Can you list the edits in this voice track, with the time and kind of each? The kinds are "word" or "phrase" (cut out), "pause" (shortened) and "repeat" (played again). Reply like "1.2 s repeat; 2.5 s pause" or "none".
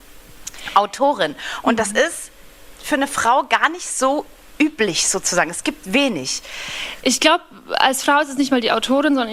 none

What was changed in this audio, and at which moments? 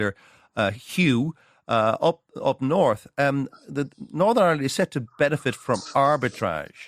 none

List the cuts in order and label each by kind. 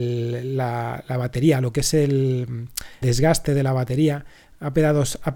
3.0 s word

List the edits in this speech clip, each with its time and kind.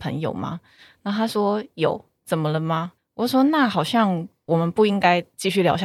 3.0 s pause

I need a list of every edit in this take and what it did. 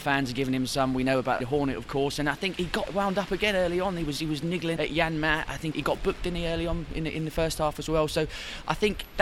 1.4 s word; 2.5 s word; 2.9 s word; 4.8 s word; 5.7 s word

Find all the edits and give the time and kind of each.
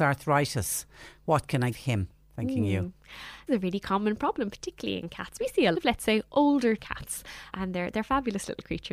1.7 s word; 3.5 s word; 5.4 s word; 5.7 s word; 6.8 s word; 7.5 s word

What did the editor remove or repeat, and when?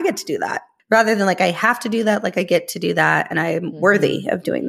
none

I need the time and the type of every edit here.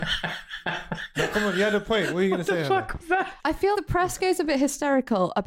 3.4 s pause; 3.7 s word

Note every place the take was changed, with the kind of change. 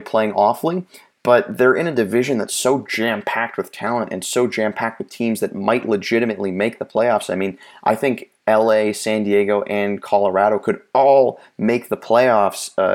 none

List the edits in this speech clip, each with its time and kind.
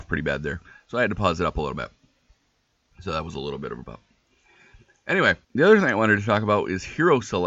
3.8 s word; 5.4 s pause

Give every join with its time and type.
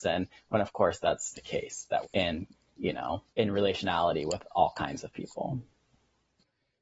1.3 s word; 2.0 s phrase; 3.3 s pause

